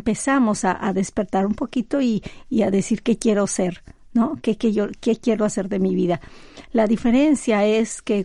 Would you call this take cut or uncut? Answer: uncut